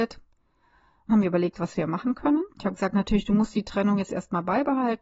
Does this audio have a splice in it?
yes; 2 cuts; at 1.1 s, 2.5 s

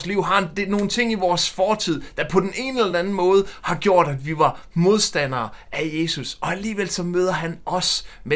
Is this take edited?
no; 0 cuts

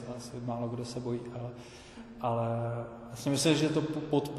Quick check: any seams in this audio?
no; 0 cuts

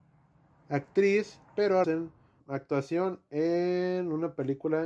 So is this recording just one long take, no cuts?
no; 3 cuts; at 1.5 s, 1.8 s, 2.4 s

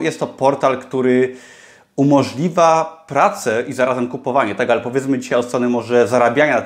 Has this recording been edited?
no; 0 cuts

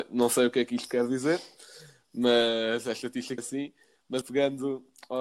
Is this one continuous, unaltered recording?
no; 2 cuts; at 3.4 s, 4.2 s

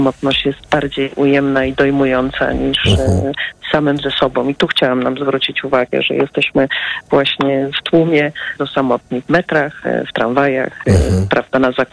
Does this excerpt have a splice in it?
yes; 1 cut; at 8.6 s

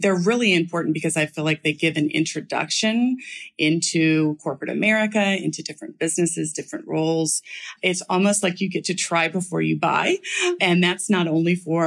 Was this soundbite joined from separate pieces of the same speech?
no; 0 cuts

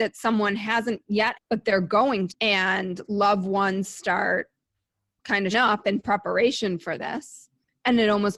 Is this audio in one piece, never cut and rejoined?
no; 4 cuts; at 1.3 s, 2.3 s, 4.9 s, 5.5 s

